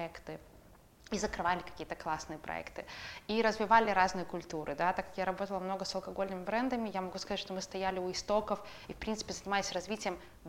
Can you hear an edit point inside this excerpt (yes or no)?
no